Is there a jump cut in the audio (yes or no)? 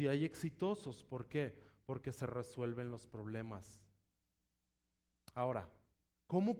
no